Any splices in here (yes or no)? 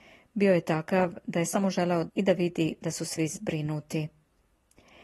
yes